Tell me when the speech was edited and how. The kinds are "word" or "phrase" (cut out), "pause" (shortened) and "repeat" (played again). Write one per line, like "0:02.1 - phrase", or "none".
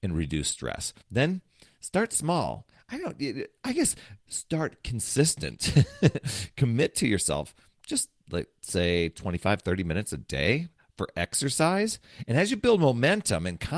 0:01.0 - pause

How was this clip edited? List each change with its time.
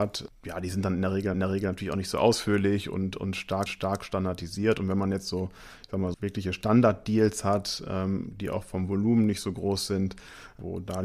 0:01.3 - repeat
0:03.7 - repeat
0:06.1 - word

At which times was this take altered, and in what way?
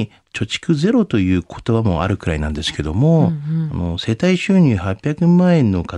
none

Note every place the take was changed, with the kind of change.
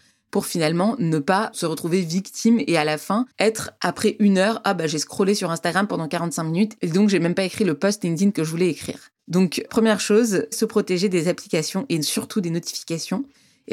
0:03.3 - pause
0:09.2 - pause

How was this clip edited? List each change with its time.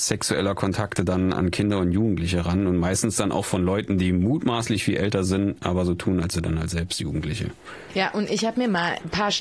0:06.3 - word

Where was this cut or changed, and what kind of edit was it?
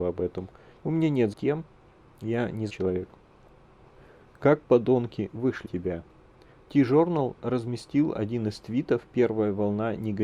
0:01.3 - word
0:02.7 - word
0:05.6 - word

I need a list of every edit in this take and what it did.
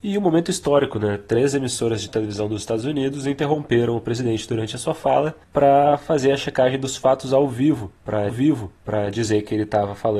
0:08.3 - repeat

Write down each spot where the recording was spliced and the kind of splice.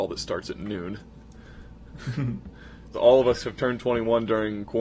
0:02.9 - word

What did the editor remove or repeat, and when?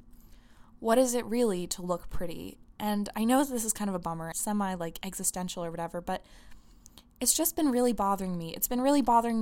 0:04.3 - word

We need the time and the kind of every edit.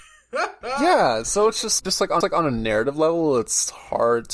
0:01.8 - word
0:02.2 - repeat

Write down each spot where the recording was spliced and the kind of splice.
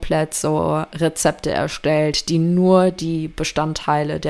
none

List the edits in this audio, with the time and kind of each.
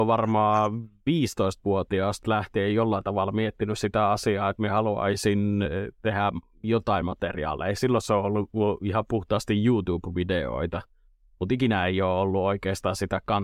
none

